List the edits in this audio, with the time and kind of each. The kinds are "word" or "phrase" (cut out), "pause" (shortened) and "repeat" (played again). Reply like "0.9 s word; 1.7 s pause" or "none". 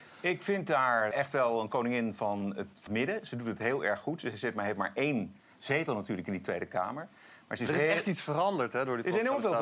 1.1 s word; 2.9 s word